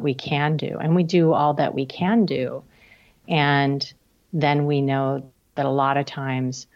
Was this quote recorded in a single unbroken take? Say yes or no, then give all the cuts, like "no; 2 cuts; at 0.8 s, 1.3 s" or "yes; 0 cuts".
yes; 0 cuts